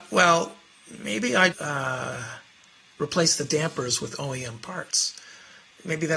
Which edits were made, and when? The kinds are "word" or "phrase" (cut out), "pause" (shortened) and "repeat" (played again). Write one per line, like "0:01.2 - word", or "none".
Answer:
0:01.5 - word